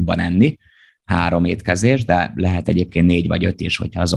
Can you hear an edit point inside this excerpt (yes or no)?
no